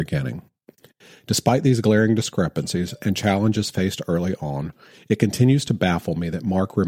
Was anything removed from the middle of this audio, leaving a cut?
no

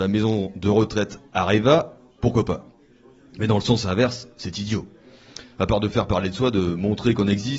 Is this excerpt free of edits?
yes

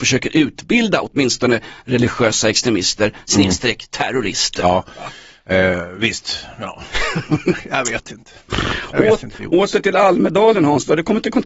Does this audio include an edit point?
no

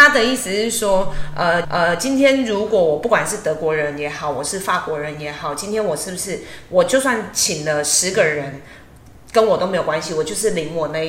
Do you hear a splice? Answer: yes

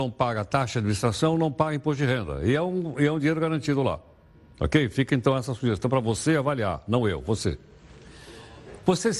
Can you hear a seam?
no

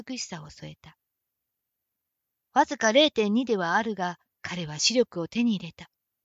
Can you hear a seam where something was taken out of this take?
yes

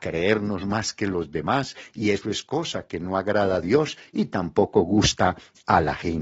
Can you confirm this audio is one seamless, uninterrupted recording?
yes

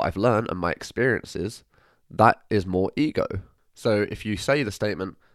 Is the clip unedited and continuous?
yes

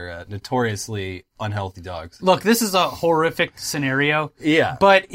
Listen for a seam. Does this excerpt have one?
no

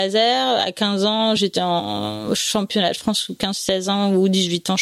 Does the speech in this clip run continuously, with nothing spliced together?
yes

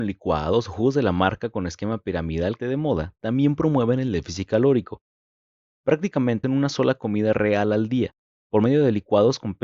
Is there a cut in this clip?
yes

